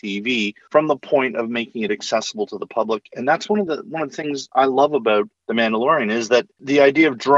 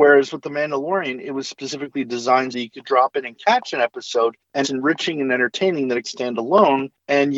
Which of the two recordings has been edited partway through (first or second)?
second